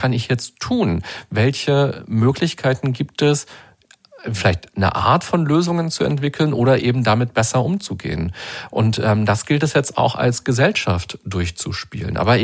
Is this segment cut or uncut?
uncut